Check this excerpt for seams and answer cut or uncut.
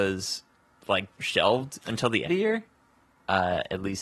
cut